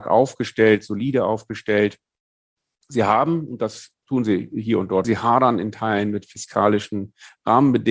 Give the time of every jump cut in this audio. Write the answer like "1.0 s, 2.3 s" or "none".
5.0 s

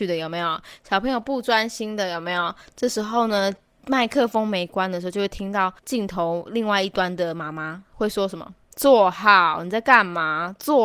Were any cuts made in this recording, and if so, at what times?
5.8 s

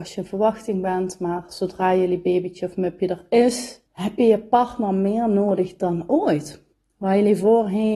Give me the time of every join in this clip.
3.9 s, 6.7 s

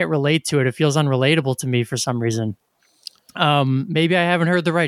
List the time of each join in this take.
none

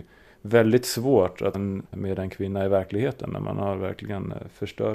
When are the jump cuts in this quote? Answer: 1.5 s, 1.8 s

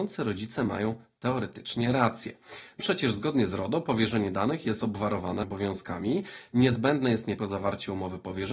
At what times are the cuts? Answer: 2.8 s, 5.4 s, 7.4 s

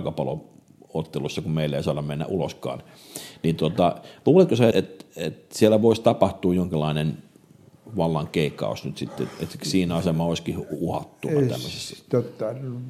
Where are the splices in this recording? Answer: 4.7 s

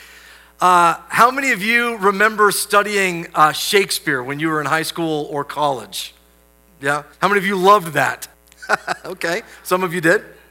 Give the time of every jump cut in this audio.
7.1 s, 8.3 s

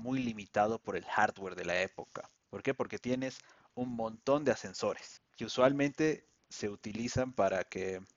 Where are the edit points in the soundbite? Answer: none

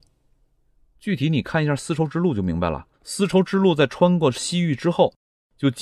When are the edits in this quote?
2.9 s

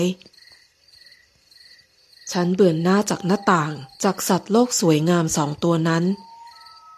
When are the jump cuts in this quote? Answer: 3.9 s

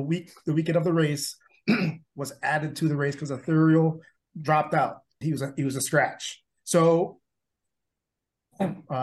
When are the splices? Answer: 4.2 s, 5.2 s

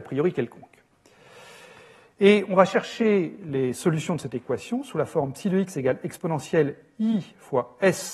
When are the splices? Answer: none

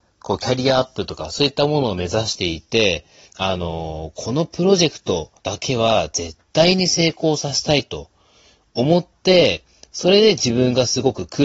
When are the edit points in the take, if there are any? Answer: 3.3 s, 5.4 s

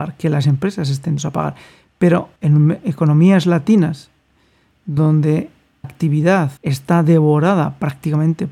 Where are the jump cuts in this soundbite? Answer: 1.2 s, 2.4 s, 5.8 s, 6.6 s

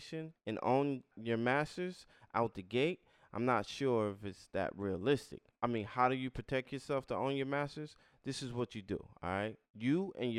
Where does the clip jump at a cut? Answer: none

